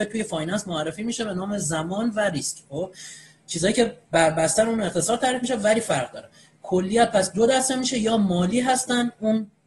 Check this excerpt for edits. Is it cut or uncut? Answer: uncut